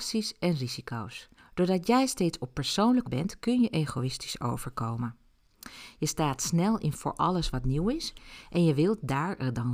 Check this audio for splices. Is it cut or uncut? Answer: cut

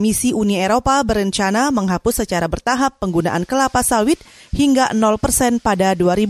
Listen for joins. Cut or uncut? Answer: uncut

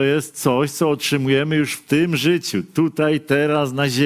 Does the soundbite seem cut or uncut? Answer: uncut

